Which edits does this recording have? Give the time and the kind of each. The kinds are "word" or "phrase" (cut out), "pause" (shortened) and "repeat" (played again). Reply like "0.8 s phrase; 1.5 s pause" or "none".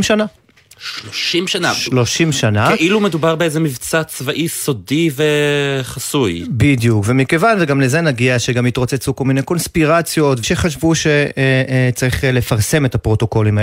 10.4 s phrase